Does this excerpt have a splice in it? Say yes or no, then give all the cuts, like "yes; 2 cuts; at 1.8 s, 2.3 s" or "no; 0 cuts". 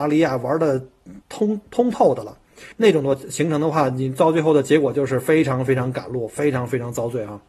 yes; 2 cuts; at 1.2 s, 2.7 s